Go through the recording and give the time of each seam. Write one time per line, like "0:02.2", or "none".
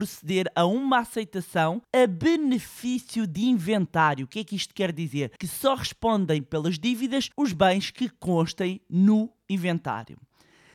0:01.8
0:05.4
0:07.3